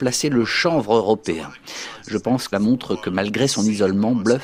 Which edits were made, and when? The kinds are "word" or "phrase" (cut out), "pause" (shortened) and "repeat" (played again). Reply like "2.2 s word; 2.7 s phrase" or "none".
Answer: 2.5 s word